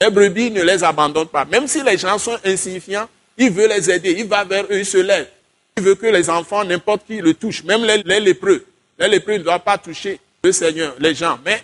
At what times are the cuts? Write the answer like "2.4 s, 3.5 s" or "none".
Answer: 8.0 s